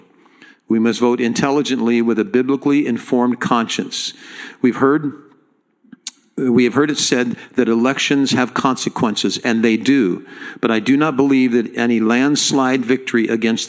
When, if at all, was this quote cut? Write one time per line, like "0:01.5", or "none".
none